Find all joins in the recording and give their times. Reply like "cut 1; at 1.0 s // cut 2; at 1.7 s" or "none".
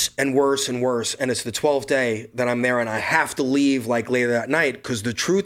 none